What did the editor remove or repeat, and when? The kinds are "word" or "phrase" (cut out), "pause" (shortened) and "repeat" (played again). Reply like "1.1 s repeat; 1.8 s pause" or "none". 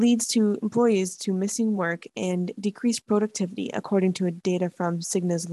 none